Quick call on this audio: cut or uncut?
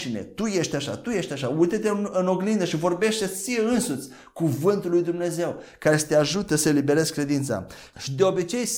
uncut